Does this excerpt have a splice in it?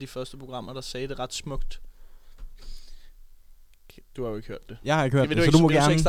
no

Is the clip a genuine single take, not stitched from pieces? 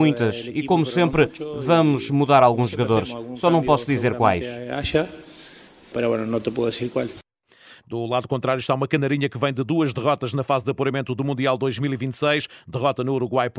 yes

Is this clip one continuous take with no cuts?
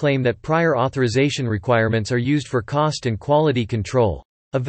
yes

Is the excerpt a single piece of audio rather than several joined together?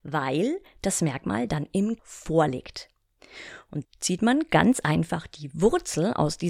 no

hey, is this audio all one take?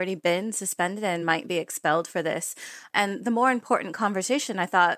yes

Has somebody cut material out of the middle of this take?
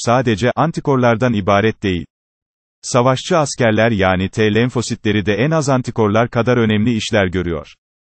no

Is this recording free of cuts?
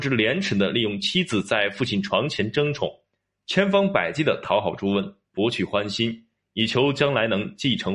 yes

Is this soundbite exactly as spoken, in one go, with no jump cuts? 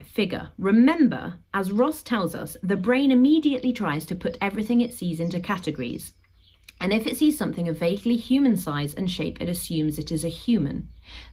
yes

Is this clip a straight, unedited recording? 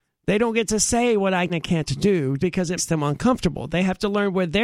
no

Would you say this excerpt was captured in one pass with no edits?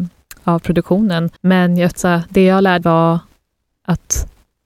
no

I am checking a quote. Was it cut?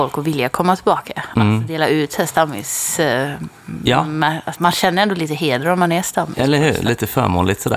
yes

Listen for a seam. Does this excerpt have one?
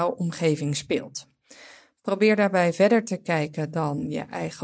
no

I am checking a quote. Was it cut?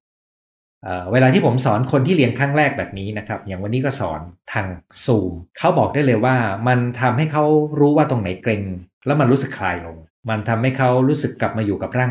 yes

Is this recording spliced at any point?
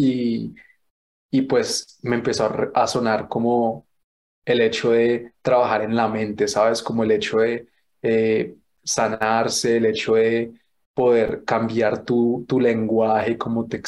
no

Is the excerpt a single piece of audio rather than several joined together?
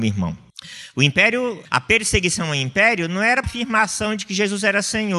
no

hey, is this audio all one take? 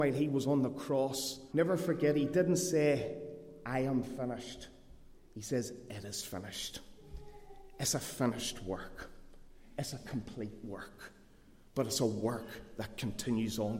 no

